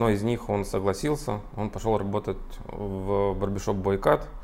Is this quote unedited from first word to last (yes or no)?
yes